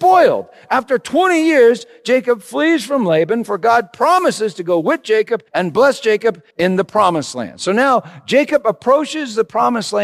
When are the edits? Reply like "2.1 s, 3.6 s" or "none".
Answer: 5.5 s, 6.5 s